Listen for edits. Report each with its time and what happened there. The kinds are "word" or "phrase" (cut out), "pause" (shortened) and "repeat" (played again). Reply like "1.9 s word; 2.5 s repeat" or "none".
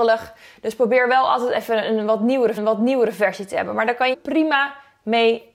2.6 s repeat; 4.1 s phrase